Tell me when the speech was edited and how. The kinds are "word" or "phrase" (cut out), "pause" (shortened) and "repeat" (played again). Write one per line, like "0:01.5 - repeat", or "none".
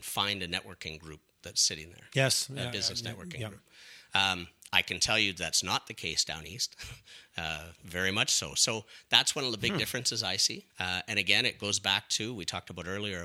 0:10.7 - pause